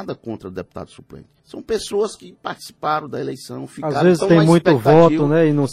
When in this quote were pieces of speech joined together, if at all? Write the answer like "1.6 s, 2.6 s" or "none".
1.4 s